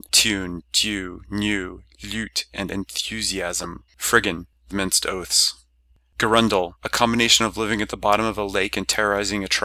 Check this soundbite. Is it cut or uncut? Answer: cut